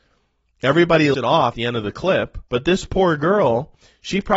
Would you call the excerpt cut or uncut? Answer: cut